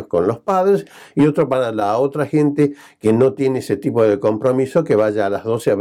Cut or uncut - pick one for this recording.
uncut